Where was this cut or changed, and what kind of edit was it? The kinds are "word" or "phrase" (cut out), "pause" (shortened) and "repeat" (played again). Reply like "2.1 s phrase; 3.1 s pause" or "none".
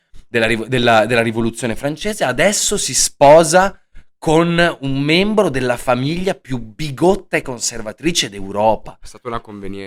none